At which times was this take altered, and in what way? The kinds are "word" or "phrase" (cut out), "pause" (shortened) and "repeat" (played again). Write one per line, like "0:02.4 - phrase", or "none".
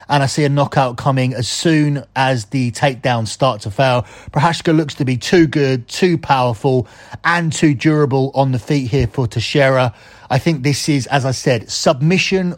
none